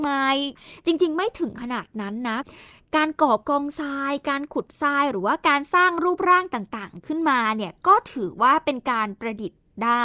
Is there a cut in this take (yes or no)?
no